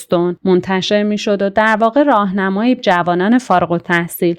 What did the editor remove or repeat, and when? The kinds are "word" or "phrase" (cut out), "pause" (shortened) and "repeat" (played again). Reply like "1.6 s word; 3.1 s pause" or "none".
2.8 s phrase